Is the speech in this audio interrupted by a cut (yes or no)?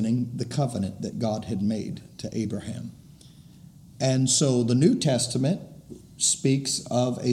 no